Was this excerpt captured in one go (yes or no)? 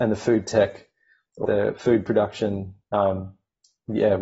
no